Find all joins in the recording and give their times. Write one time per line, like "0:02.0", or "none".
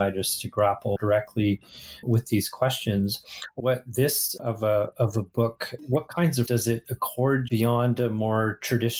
0:01.0
0:02.0
0:03.6
0:04.4
0:04.9
0:05.8
0:06.5
0:07.5